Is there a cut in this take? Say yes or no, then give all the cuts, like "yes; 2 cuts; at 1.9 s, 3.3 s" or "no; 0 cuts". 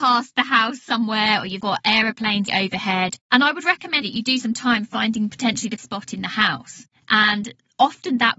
yes; 5 cuts; at 1.6 s, 2.5 s, 4.0 s, 4.4 s, 5.8 s